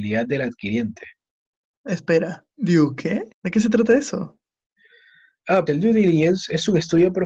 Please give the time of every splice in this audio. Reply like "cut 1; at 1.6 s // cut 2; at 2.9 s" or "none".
cut 1; at 2.5 s // cut 2; at 3.3 s // cut 3; at 5.7 s